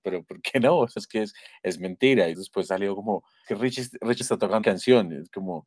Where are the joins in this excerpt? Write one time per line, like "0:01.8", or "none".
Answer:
0:01.0
0:02.3
0:03.4
0:04.2
0:04.6